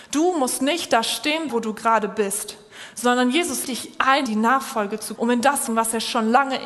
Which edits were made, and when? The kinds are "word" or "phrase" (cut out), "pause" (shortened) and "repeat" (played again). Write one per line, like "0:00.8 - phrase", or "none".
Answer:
0:01.5 - word
0:03.6 - word
0:04.3 - word
0:05.2 - word
0:05.7 - word